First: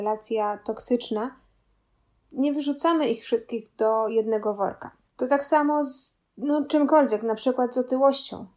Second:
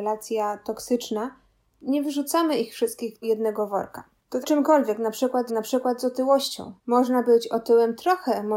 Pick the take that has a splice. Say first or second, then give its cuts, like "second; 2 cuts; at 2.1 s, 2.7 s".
second; 5 cuts; at 1.6 s, 3.2 s, 4.4 s, 5.5 s, 6.8 s